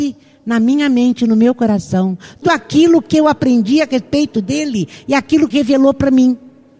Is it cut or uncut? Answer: cut